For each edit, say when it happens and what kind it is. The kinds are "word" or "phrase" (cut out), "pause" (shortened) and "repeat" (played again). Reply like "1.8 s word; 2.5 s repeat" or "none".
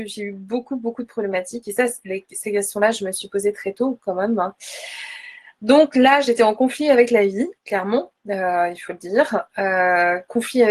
7.6 s pause